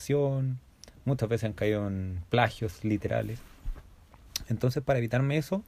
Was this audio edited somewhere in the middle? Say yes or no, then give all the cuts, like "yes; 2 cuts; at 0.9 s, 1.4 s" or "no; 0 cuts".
no; 0 cuts